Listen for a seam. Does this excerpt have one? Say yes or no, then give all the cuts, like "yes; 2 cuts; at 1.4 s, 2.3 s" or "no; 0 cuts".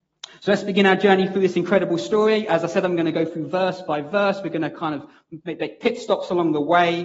no; 0 cuts